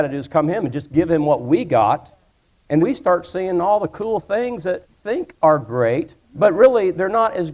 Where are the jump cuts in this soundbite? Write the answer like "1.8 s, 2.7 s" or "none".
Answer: 2.8 s, 4.9 s, 6.2 s